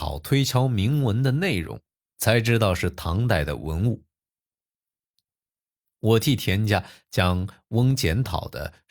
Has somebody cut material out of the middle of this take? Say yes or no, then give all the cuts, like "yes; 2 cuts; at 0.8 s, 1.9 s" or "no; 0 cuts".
yes; 1 cut; at 2.1 s